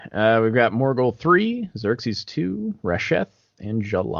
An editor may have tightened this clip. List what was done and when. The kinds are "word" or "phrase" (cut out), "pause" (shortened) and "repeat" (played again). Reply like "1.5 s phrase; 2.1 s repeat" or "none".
none